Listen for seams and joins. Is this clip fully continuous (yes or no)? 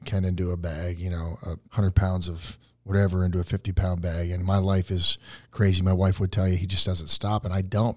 no